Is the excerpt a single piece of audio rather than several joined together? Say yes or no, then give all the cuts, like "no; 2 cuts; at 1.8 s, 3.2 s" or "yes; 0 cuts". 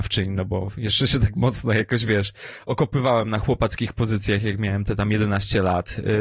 yes; 0 cuts